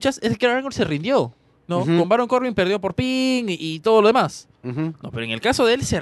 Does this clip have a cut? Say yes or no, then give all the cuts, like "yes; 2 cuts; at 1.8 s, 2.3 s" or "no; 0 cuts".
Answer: no; 0 cuts